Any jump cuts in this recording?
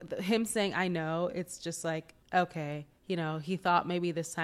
yes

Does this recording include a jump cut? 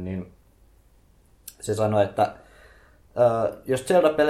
no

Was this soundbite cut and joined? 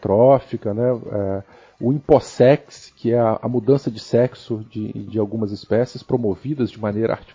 no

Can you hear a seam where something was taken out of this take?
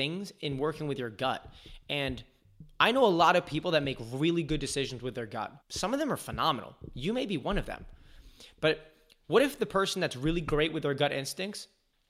yes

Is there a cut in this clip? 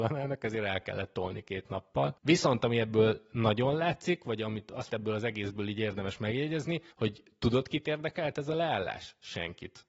yes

